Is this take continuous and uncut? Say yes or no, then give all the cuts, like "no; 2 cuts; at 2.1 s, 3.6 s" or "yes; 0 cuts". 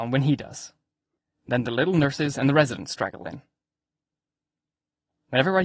yes; 0 cuts